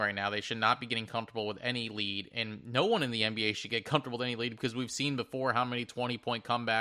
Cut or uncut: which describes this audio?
uncut